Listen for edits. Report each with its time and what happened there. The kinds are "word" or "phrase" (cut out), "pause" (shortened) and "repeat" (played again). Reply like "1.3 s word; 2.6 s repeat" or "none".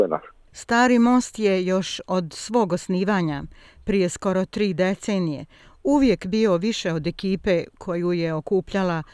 none